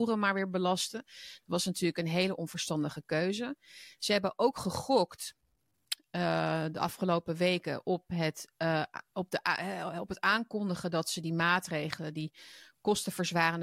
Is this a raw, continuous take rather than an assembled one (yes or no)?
yes